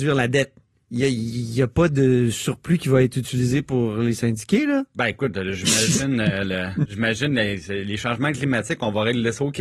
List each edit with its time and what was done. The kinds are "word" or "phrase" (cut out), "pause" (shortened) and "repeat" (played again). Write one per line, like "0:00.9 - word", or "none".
none